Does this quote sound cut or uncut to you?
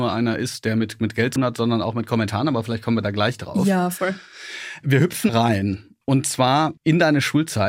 cut